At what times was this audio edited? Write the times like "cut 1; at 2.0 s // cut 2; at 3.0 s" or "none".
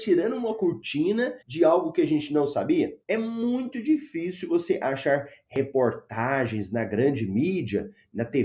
cut 1; at 1.4 s // cut 2; at 3.0 s